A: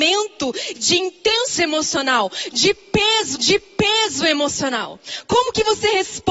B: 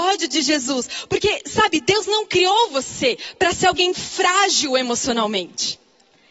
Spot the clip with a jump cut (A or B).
A